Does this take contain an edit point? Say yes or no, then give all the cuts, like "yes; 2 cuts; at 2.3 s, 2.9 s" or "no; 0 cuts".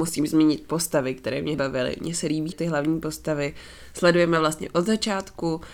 yes; 2 cuts; at 1.5 s, 2.5 s